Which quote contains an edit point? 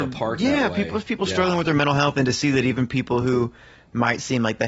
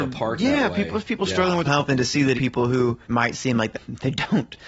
second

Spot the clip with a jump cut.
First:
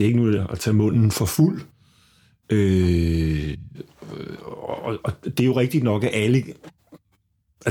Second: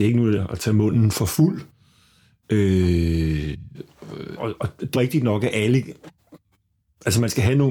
second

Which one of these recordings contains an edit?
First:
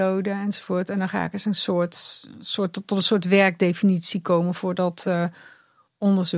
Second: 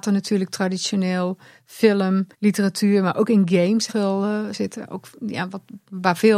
second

